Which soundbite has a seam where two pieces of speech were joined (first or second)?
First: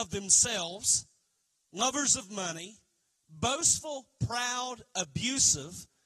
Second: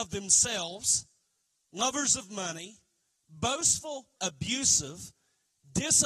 second